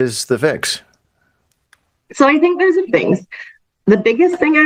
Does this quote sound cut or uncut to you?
cut